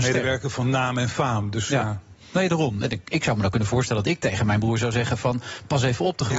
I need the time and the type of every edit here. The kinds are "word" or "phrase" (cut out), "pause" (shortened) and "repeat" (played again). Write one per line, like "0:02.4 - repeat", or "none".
0:02.2 - pause